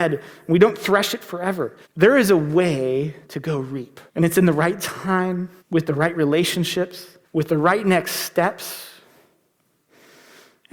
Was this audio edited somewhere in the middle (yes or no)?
yes